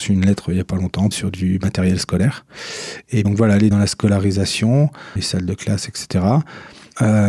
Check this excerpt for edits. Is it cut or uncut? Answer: cut